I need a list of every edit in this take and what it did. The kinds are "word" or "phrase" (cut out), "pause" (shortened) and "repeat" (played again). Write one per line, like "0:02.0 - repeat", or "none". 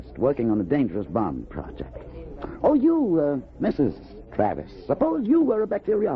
0:03.6 - word